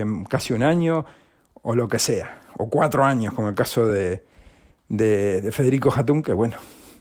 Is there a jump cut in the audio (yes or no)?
no